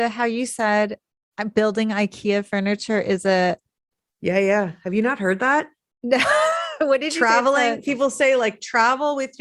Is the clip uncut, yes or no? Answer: yes